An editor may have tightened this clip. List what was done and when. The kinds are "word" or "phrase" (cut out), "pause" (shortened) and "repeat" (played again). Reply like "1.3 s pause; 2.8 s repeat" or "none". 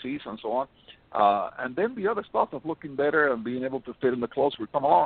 none